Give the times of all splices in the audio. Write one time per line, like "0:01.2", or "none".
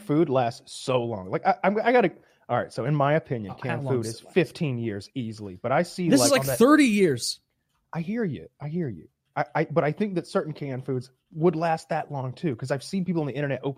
none